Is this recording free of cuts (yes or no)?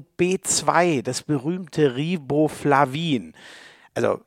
yes